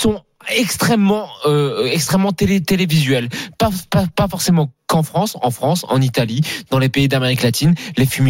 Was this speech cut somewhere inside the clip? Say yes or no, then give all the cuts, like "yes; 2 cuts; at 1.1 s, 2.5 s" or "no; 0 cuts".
no; 0 cuts